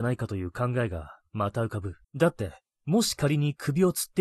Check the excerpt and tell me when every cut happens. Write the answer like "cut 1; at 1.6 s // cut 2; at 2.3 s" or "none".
cut 1; at 2.0 s // cut 2; at 2.7 s